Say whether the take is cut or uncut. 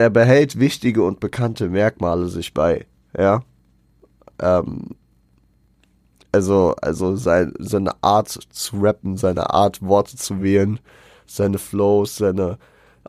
uncut